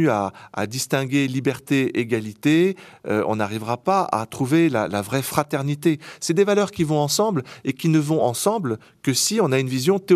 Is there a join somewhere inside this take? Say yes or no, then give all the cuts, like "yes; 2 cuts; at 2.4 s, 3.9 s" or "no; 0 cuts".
no; 0 cuts